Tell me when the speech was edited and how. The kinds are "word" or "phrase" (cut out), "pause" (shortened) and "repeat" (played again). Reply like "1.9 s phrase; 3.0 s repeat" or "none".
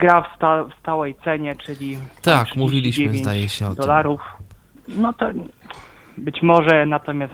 4.6 s pause